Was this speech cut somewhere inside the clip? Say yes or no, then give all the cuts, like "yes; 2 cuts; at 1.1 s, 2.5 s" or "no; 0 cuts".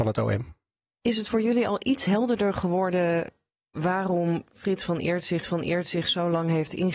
yes; 1 cut; at 5.4 s